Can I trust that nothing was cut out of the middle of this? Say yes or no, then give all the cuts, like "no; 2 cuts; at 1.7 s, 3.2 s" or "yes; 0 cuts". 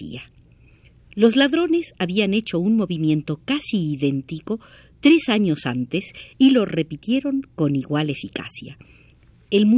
yes; 0 cuts